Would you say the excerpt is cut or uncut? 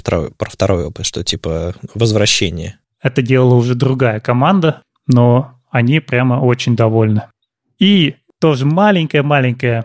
uncut